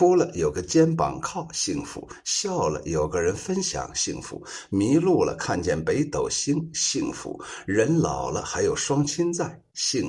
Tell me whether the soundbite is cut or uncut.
uncut